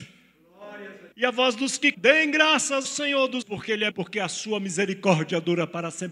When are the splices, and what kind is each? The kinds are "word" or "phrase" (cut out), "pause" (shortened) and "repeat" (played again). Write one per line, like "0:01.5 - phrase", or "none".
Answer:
0:01.1 - pause
0:01.9 - word
0:02.8 - word
0:03.4 - word
0:03.9 - word

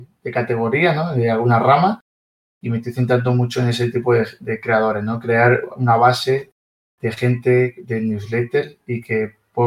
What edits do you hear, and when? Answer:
none

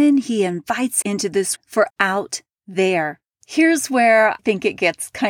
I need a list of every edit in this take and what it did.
0:01.0 - word
0:01.6 - word
0:01.9 - word
0:04.4 - word

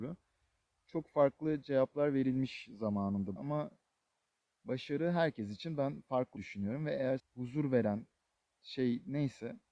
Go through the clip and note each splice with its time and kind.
0:03.4 - word
0:06.4 - word
0:07.2 - word

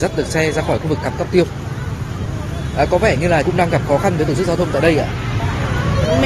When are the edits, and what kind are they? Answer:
0:03.4 - word

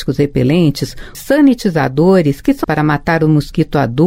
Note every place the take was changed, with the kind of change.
0:01.1 - word
0:02.6 - word

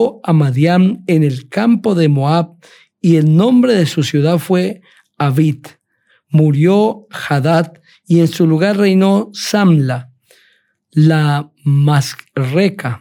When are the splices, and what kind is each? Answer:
none

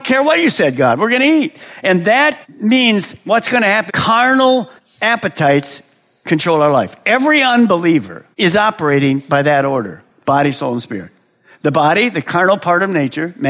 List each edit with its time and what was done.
0:02.4 - pause
0:03.9 - word
0:04.8 - pause
0:08.3 - pause

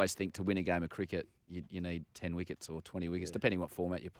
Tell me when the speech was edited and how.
0:01.4 - pause

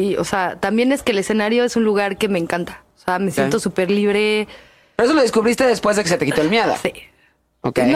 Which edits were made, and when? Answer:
none

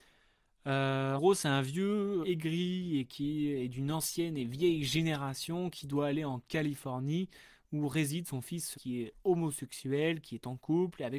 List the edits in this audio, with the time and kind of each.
0:01.2 - word
0:02.2 - word
0:08.7 - word

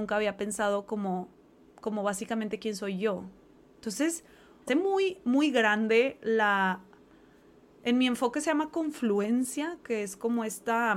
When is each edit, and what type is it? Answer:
0:01.4 - pause
0:04.7 - phrase

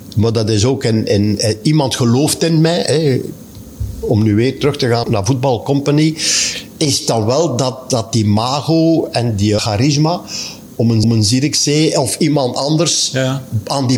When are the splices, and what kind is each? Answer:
0:05.0 - word
0:09.6 - phrase
0:11.0 - repeat

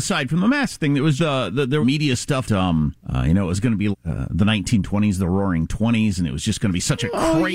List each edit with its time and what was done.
0:01.2 - word
0:01.8 - phrase
0:02.4 - word
0:03.0 - pause
0:03.9 - word

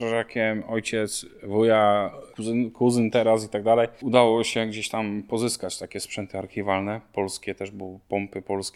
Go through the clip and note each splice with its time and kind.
none

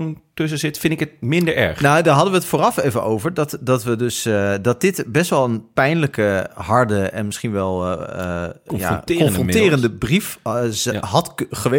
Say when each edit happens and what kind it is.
none

